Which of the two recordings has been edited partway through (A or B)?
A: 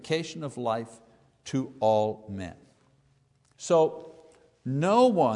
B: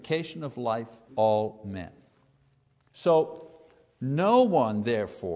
B